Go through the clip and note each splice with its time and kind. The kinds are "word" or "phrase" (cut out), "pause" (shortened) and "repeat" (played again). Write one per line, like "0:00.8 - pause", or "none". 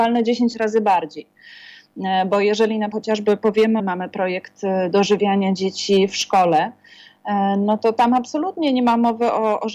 0:02.9 - word
0:03.8 - phrase